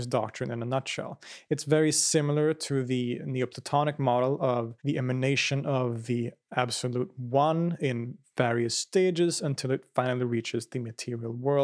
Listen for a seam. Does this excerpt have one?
yes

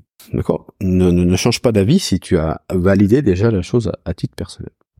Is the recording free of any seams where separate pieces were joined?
yes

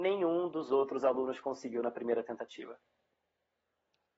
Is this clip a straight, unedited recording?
yes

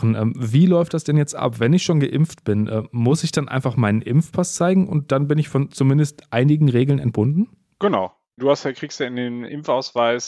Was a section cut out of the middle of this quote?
no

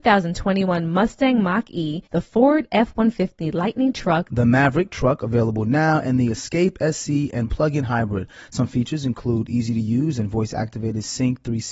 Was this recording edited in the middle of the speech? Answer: yes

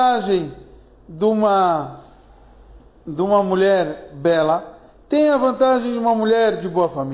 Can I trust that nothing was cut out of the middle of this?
yes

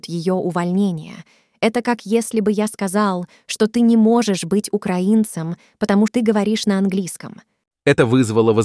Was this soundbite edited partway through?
yes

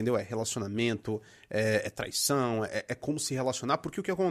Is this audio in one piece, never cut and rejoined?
yes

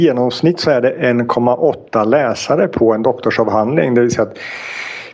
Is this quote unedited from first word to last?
yes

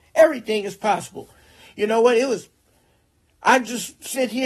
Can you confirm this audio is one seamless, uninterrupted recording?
yes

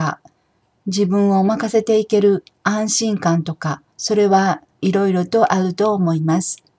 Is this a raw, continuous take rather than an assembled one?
no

